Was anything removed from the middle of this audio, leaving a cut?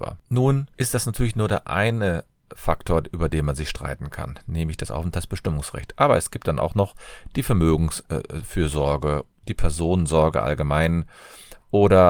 no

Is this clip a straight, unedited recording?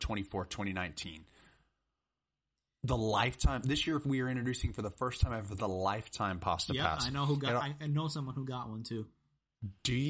yes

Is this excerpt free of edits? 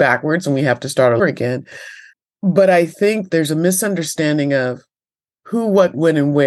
no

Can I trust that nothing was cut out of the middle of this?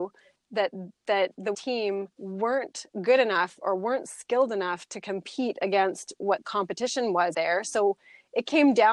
no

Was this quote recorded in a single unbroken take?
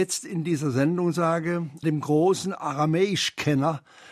no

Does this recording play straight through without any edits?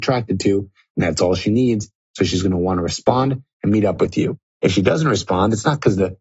yes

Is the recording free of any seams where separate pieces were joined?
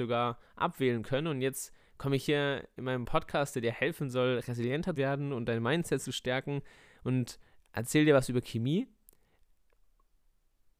no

